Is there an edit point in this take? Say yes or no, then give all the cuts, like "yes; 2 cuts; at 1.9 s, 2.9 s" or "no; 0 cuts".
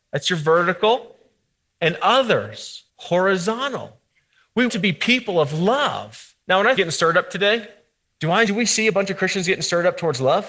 yes; 6 cuts; at 2.9 s, 4.7 s, 6.4 s, 6.8 s, 8.1 s, 8.5 s